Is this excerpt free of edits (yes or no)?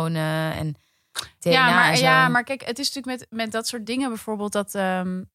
yes